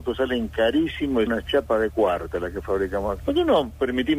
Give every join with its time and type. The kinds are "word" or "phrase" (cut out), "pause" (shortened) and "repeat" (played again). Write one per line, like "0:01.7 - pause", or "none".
0:01.3 - word
0:03.2 - word